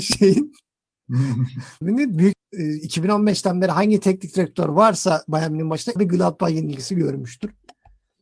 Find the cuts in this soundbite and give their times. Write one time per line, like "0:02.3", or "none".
0:01.8
0:02.3
0:06.0